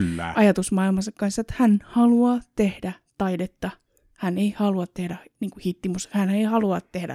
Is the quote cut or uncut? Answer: uncut